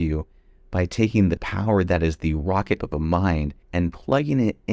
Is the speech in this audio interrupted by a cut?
yes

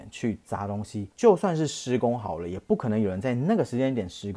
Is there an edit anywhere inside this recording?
yes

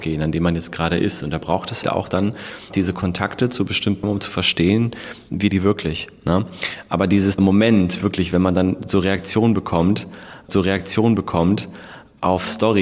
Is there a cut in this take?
yes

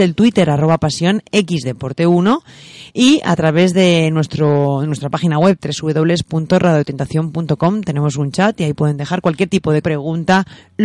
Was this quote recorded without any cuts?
no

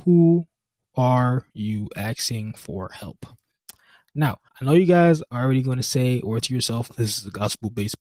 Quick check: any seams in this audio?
yes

